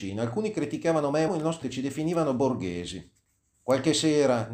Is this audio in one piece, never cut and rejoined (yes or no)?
no